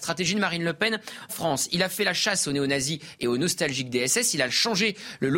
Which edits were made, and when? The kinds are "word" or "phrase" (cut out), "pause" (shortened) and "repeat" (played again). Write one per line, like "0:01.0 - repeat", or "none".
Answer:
0:01.3 - word